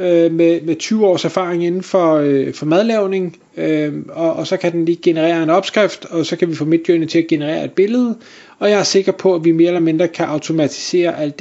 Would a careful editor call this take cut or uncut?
uncut